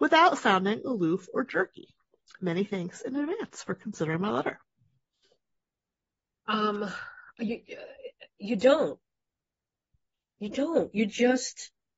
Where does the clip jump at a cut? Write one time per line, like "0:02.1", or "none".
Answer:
none